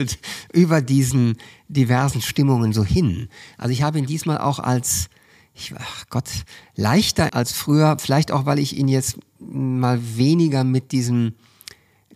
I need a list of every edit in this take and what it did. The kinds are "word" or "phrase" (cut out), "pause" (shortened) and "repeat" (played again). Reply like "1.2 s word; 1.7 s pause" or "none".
7.3 s word